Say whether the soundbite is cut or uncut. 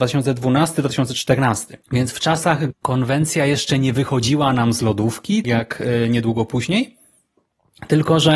cut